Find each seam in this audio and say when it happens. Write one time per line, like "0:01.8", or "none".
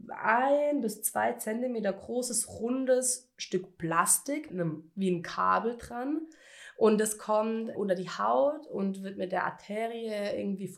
0:04.5
0:07.7